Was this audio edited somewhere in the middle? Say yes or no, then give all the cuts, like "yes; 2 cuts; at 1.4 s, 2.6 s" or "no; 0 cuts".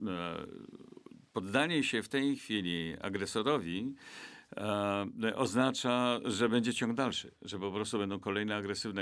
no; 0 cuts